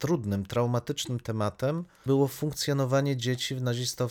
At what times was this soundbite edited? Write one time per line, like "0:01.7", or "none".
0:02.1